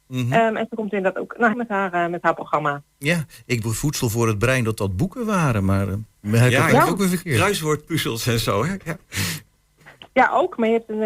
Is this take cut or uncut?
cut